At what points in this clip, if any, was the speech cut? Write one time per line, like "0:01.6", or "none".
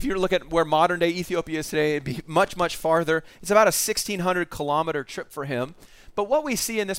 none